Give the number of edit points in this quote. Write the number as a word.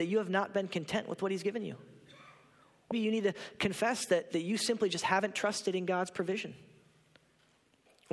one